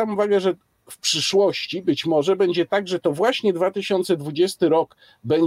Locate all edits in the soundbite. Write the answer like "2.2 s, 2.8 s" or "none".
none